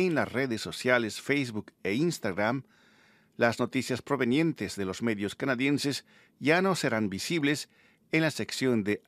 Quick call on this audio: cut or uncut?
uncut